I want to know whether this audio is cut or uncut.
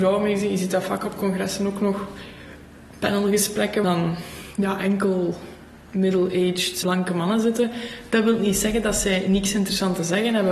cut